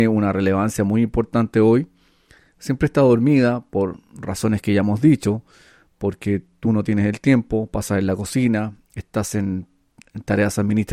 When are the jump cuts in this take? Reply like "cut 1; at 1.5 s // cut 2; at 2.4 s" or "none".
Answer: none